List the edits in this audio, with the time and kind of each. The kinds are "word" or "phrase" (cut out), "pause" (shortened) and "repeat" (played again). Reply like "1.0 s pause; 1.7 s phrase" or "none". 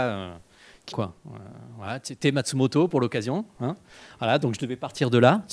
0.9 s phrase